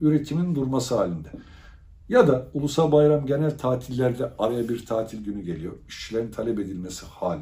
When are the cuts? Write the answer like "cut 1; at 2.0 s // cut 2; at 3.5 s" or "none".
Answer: none